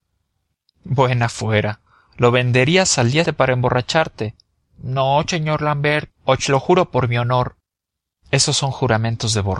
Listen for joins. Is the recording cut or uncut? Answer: cut